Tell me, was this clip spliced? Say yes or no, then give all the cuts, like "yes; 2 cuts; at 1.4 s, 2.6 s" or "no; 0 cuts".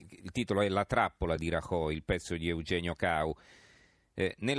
no; 0 cuts